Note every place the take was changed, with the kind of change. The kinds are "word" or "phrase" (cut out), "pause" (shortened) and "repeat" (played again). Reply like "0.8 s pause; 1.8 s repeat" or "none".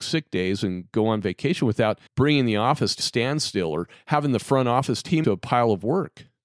2.1 s pause; 3.0 s word; 5.2 s phrase